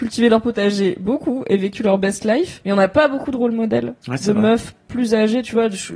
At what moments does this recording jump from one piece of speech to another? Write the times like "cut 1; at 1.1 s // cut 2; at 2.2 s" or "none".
cut 1; at 4.0 s